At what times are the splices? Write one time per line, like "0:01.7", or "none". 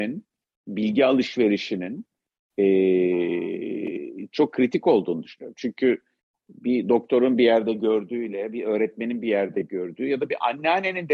none